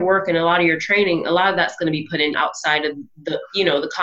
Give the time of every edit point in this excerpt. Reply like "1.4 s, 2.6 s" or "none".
2.3 s

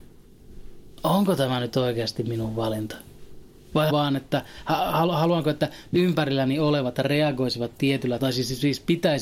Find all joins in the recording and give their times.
3.9 s, 8.2 s

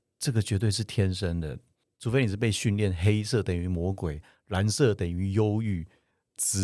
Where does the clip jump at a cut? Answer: none

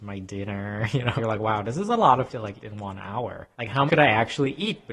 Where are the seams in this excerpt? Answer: 1.2 s, 2.3 s, 2.6 s, 3.5 s, 3.9 s

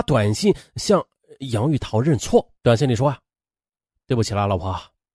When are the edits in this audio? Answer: 2.6 s

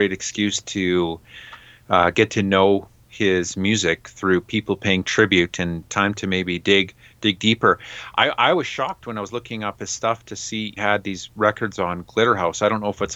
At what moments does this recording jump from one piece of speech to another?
10.8 s

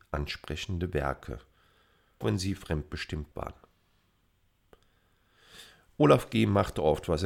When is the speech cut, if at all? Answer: 2.2 s, 3.3 s

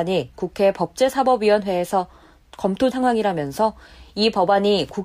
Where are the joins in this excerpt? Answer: 2.9 s

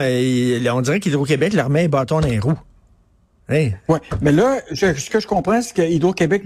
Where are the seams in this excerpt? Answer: none

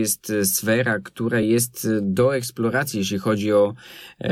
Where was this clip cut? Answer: none

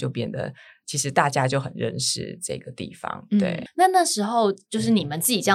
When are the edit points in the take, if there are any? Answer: 3.7 s

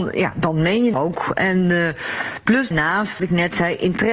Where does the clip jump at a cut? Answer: 0.9 s, 2.7 s, 3.2 s

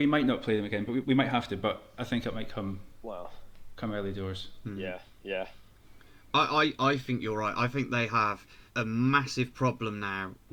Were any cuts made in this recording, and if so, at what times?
1.0 s, 8.7 s

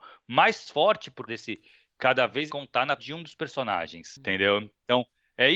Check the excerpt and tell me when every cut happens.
1.3 s, 2.5 s, 3.0 s

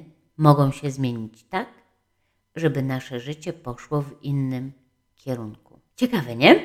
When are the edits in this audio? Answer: none

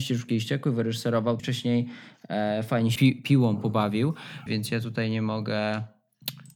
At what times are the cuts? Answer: 1.4 s, 3.0 s, 4.5 s

